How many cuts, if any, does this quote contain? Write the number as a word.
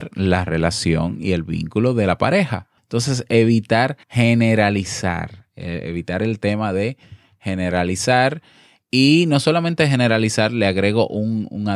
two